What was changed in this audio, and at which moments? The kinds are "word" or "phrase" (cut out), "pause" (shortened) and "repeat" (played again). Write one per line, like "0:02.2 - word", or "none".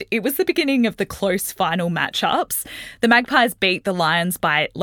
none